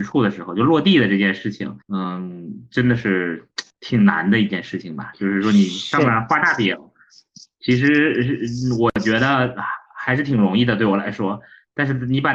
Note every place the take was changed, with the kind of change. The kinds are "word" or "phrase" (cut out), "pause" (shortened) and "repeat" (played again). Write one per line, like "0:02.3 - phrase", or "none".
0:01.8 - pause
0:03.7 - pause